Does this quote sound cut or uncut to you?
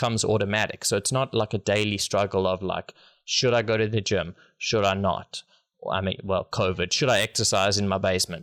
uncut